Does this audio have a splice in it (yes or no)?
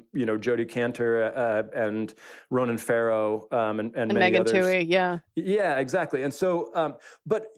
no